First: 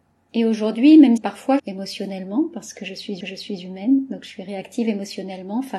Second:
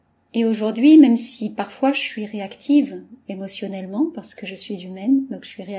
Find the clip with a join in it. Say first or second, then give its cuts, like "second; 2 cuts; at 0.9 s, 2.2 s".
first; 3 cuts; at 1.2 s, 1.6 s, 3.2 s